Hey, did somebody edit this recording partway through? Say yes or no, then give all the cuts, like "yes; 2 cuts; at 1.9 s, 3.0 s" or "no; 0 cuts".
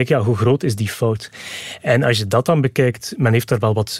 no; 0 cuts